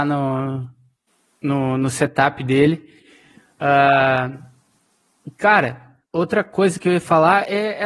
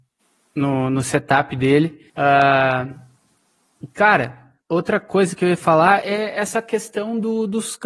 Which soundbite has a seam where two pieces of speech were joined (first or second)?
second